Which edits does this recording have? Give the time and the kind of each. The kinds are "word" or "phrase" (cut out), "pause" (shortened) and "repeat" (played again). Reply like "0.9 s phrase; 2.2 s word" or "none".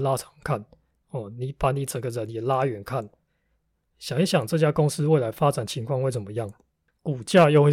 none